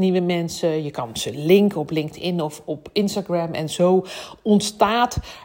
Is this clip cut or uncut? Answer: uncut